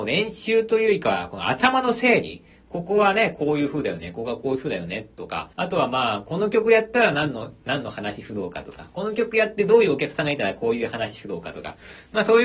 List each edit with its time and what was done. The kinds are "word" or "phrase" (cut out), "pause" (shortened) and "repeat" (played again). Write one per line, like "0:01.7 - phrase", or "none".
0:05.5 - pause